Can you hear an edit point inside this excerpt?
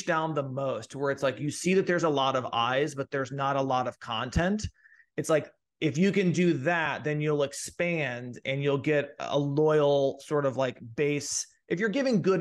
no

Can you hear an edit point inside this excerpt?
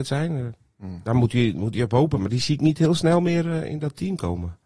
no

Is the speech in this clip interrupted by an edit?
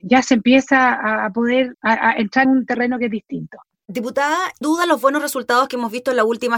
yes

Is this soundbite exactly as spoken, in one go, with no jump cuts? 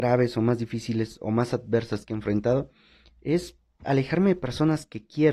yes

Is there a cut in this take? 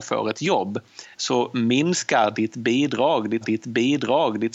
yes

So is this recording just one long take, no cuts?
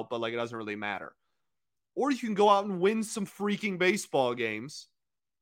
yes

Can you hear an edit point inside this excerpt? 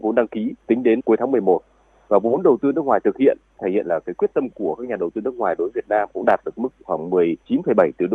no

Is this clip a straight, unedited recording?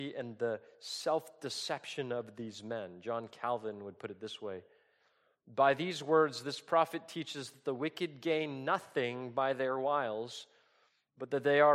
yes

